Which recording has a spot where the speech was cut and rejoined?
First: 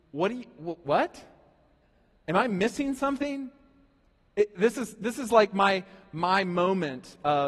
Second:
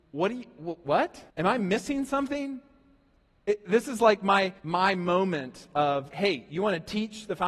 second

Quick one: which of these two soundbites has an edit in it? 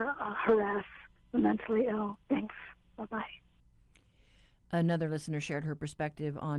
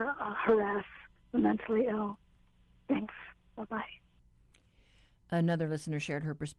first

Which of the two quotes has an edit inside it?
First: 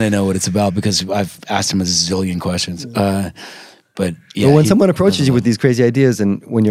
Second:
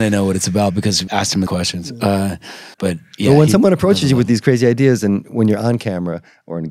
second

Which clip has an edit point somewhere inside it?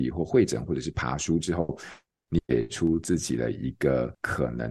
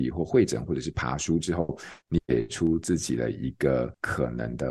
second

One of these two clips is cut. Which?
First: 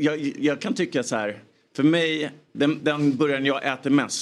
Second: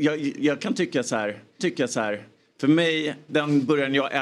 second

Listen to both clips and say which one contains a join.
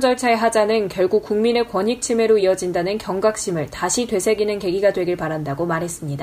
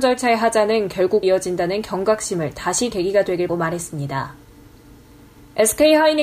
second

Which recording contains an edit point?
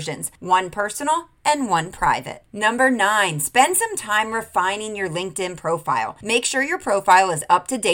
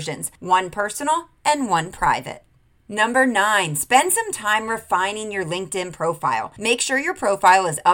first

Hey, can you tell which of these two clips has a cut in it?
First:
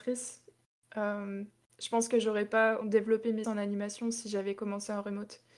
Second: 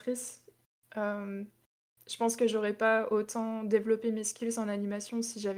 first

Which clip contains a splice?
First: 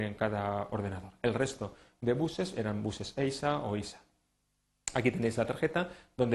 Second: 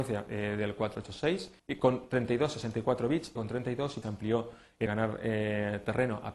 second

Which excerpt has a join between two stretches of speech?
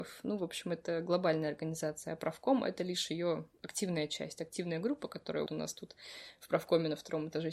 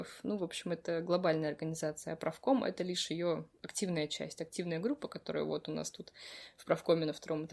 first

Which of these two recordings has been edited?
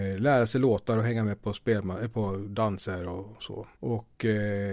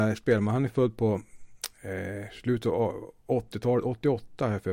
first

